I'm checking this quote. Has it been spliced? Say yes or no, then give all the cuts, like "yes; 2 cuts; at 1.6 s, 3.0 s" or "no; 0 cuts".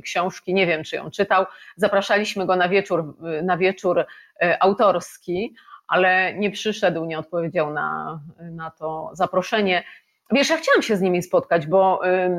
no; 0 cuts